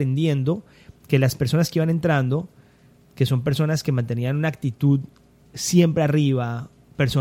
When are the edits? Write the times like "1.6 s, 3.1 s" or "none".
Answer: none